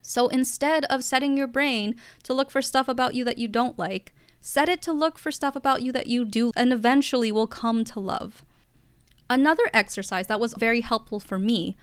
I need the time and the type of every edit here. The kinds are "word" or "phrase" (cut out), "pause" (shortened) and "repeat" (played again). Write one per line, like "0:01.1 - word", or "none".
0:06.5 - word
0:10.6 - word